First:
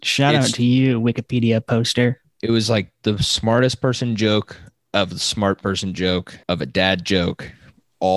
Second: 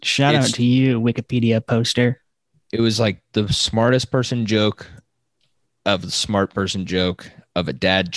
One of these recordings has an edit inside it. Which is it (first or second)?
first